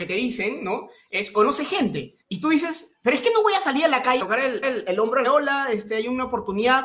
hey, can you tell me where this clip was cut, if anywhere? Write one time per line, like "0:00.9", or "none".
0:02.2
0:04.2
0:04.6
0:05.2